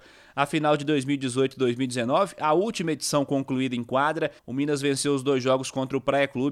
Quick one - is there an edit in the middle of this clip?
yes; 1 cut; at 4.4 s

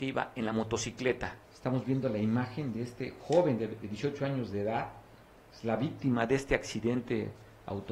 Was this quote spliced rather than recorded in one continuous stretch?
yes; 1 cut; at 1.4 s

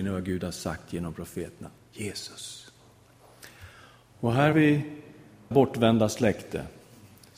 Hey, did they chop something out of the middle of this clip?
yes; 3 cuts; at 1.8 s, 4.5 s, 5.5 s

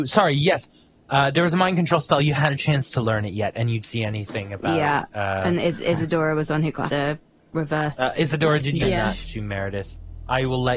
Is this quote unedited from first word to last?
no; 4 cuts; at 2.4 s, 3.8 s, 6.9 s, 8.8 s

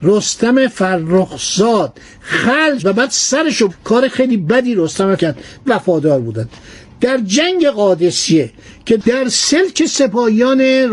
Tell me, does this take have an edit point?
yes; 4 cuts; at 2.8 s, 3.7 s, 5.2 s, 5.7 s

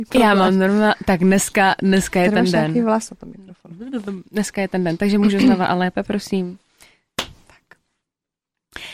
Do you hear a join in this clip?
no; 0 cuts

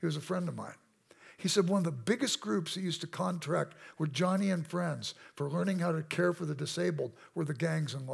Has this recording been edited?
no; 0 cuts

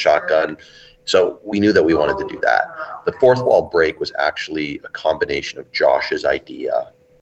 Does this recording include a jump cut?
no; 0 cuts

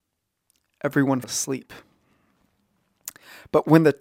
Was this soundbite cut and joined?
yes; 1 cut; at 1.2 s

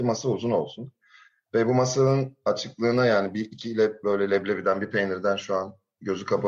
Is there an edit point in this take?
no; 0 cuts

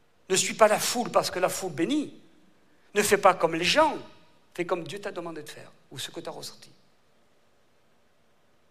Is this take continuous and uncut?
yes; 0 cuts

